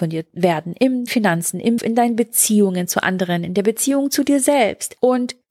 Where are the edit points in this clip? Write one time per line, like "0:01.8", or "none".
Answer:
0:01.1
0:01.8